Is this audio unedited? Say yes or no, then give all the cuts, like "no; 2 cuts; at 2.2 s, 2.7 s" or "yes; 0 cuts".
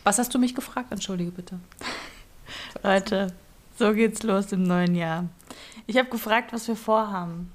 yes; 0 cuts